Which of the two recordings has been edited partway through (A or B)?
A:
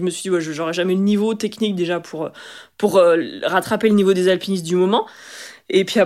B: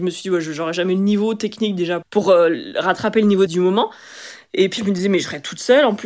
B